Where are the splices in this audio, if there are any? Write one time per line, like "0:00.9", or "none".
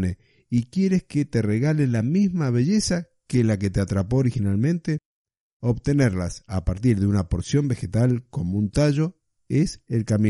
none